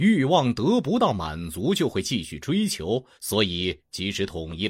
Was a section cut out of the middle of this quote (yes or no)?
yes